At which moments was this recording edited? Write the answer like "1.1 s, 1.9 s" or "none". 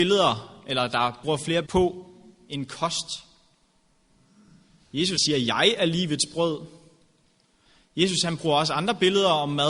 1.2 s, 1.6 s, 5.2 s